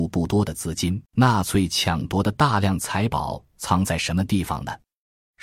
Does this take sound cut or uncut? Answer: cut